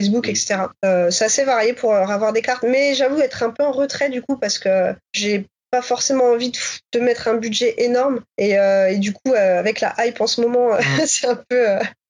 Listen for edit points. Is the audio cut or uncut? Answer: cut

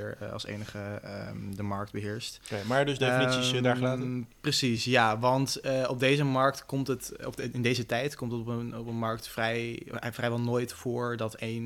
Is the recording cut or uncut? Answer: uncut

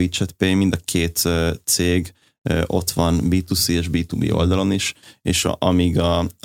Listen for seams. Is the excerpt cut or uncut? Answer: uncut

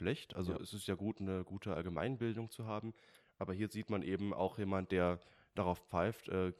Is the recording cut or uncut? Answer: uncut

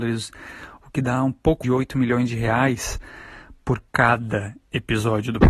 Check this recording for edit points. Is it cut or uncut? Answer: cut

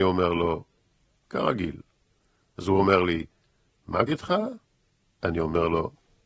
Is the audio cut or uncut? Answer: cut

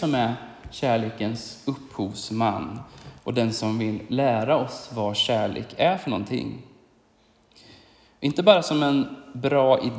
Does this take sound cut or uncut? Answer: uncut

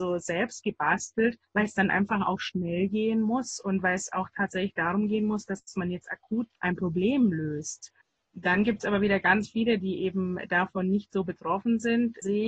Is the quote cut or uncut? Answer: cut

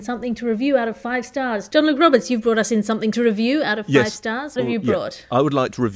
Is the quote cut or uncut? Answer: cut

